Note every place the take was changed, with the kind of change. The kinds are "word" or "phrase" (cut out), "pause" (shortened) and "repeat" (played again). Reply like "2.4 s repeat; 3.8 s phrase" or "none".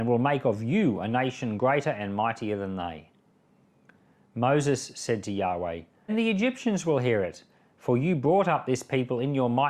6.1 s word